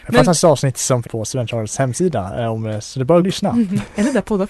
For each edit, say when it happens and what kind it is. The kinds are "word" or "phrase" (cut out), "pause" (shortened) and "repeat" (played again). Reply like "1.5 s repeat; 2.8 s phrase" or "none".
1.0 s phrase; 3.2 s phrase